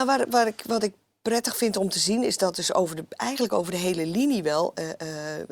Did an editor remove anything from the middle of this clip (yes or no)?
no